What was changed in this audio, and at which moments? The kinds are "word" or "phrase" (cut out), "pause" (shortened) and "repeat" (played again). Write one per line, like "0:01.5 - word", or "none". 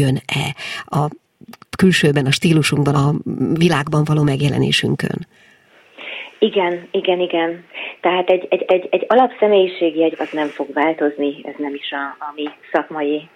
0:01.6 - word
0:02.9 - word
0:08.7 - repeat
0:10.1 - word